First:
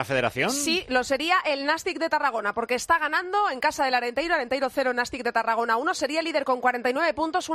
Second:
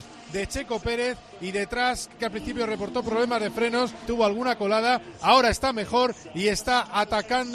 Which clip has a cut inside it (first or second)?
second